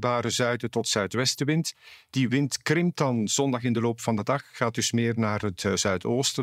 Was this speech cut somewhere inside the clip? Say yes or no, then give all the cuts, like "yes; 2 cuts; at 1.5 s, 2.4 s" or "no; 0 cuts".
no; 0 cuts